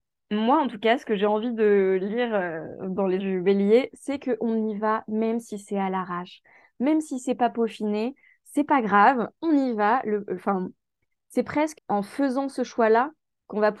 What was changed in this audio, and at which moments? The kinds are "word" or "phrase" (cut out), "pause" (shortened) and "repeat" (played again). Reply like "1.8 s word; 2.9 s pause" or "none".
3.2 s word; 11.7 s word